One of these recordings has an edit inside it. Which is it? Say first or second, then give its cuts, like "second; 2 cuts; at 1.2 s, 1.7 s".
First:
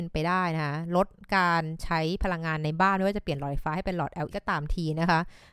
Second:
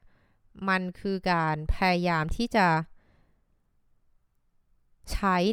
first; 1 cut; at 4.3 s